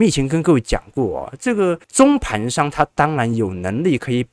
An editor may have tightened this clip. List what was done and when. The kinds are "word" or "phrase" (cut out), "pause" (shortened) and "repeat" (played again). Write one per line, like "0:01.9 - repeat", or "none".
0:01.8 - pause